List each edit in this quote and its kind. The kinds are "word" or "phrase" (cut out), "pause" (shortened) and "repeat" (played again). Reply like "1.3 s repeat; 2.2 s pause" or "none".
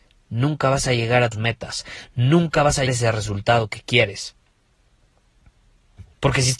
1.3 s word; 2.9 s word